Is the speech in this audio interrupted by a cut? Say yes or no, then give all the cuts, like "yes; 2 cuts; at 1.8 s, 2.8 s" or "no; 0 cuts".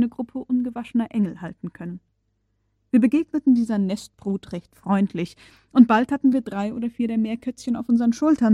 no; 0 cuts